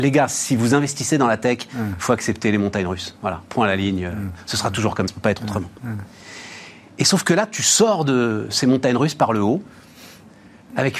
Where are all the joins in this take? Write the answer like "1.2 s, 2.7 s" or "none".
5.1 s

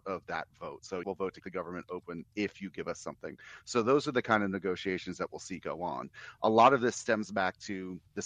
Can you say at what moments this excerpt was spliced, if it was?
1.0 s, 1.4 s

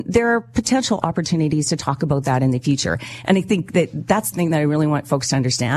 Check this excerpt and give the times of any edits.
4.3 s

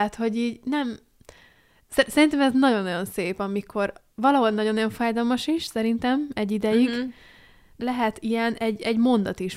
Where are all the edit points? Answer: none

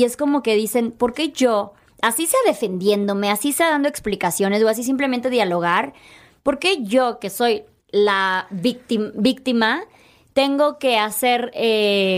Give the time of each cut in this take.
none

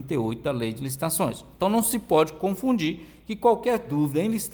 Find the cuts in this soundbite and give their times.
none

